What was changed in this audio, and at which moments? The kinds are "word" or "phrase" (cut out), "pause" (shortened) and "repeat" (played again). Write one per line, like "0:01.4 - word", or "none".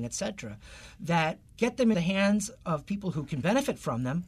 0:01.5 - word
0:01.9 - word